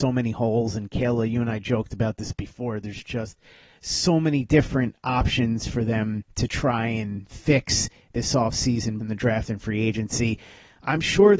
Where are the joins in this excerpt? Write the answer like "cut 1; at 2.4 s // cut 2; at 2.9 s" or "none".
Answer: cut 1; at 9.0 s